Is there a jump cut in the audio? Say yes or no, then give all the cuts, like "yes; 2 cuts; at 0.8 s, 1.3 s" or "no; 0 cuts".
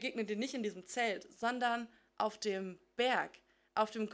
no; 0 cuts